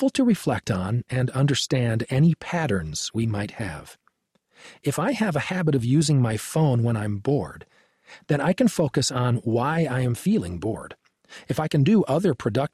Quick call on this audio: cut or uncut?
uncut